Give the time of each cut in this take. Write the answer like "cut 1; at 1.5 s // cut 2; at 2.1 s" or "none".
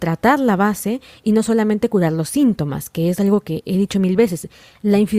none